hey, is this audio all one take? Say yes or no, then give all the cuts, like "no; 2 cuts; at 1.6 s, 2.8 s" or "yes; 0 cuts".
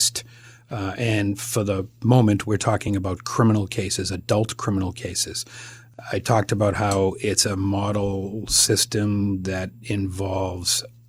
yes; 0 cuts